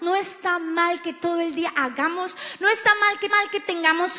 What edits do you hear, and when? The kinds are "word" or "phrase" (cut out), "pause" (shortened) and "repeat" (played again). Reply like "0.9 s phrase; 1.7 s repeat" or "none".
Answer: 3.3 s repeat